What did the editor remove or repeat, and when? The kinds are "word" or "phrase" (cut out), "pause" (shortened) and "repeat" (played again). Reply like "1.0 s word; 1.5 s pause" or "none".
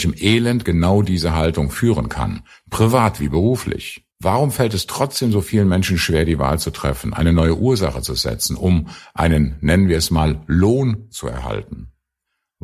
4.1 s pause